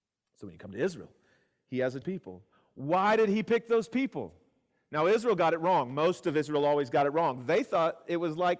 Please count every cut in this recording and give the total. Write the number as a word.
one